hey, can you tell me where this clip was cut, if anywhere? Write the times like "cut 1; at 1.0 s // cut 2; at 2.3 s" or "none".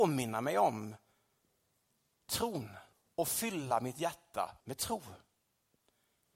cut 1; at 2.9 s // cut 2; at 4.6 s